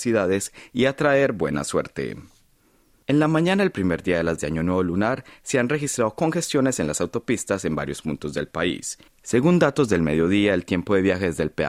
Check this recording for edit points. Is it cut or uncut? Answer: cut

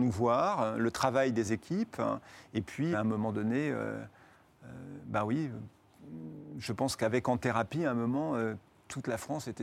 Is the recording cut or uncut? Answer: cut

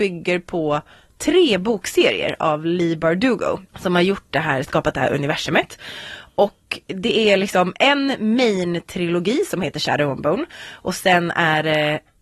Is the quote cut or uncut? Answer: cut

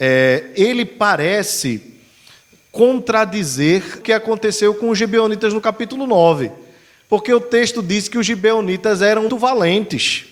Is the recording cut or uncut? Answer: cut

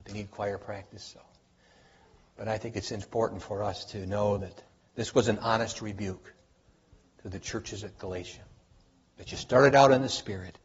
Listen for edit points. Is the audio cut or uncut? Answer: uncut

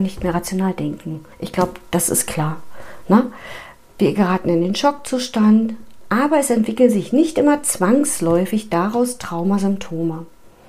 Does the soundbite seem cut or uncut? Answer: cut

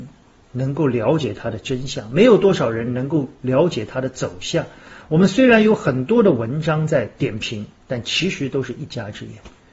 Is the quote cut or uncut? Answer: uncut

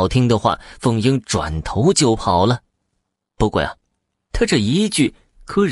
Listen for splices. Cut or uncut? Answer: uncut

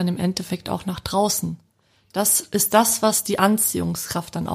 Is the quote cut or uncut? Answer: uncut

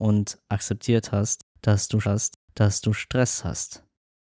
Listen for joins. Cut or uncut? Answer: cut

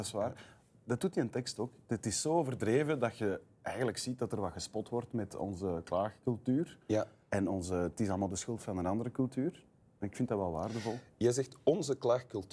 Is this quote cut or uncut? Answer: uncut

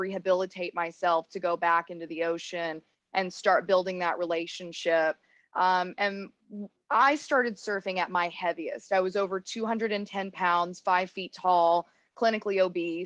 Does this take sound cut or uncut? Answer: uncut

